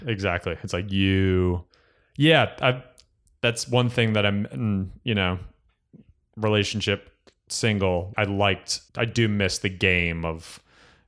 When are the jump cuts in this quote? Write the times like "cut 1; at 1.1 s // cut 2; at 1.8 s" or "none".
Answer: cut 1; at 8.1 s // cut 2; at 8.9 s